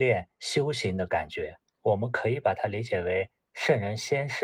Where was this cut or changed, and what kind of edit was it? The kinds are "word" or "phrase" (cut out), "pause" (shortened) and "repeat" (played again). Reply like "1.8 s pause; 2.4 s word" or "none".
1.7 s pause